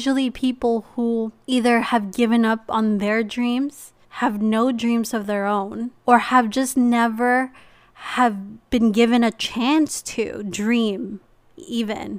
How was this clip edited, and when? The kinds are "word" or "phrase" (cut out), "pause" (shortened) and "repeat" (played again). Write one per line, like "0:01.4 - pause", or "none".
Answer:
0:01.4 - pause
0:04.0 - pause
0:06.0 - pause